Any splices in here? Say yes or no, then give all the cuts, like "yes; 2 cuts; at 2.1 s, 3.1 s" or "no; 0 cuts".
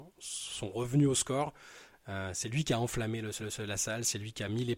yes; 1 cut; at 3.4 s